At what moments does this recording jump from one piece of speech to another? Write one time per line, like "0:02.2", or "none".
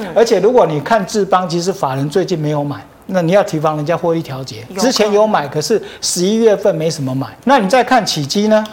0:03.0
0:07.4